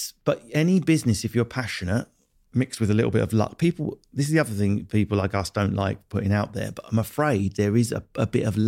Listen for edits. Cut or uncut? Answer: uncut